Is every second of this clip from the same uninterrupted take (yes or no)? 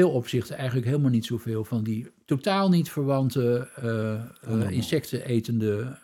yes